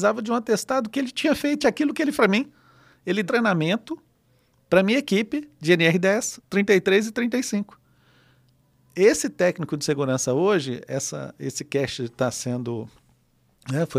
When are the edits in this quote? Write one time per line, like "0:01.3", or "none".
0:01.6
0:02.2
0:03.3